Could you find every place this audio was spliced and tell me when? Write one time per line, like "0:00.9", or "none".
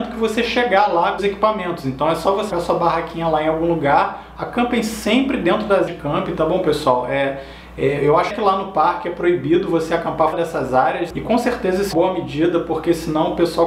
0:01.2
0:02.5
0:05.9
0:08.3
0:10.3
0:11.9